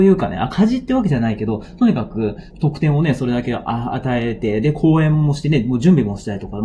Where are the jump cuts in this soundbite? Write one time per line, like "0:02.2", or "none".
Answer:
0:02.5